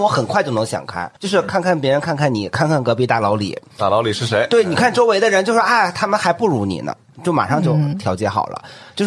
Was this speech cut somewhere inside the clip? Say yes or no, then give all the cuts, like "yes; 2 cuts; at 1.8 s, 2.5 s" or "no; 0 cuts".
yes; 1 cut; at 1.2 s